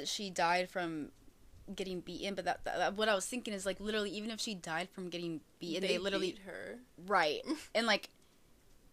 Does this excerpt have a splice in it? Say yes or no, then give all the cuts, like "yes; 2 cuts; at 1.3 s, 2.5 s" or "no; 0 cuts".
no; 0 cuts